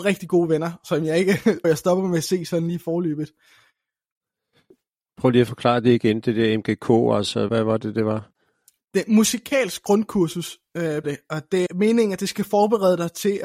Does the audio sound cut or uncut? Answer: cut